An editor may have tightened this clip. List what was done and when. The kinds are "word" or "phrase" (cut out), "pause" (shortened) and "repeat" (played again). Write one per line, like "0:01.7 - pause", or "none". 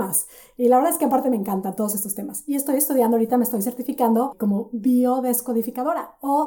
none